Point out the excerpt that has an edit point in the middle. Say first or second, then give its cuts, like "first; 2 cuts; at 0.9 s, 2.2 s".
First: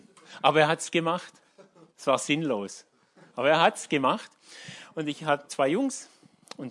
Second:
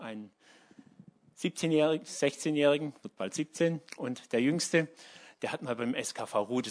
first; 3 cuts; at 1.9 s, 3.3 s, 5.5 s